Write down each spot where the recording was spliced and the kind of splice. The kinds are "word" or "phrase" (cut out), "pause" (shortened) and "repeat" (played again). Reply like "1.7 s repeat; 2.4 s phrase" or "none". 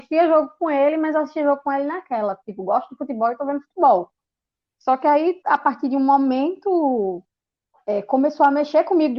none